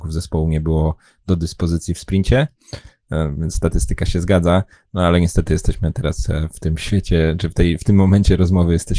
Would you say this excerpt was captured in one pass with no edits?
yes; 0 cuts

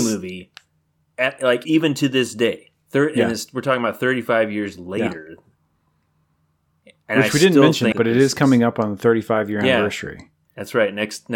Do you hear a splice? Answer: yes; 2 cuts; at 1.6 s, 7.9 s

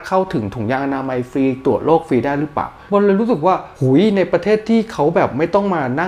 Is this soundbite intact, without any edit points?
yes; 0 cuts

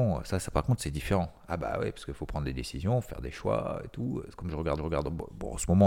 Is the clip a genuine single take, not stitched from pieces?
no; 1 cut; at 4.8 s

